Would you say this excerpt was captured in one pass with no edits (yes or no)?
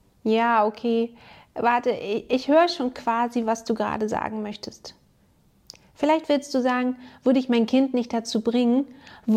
yes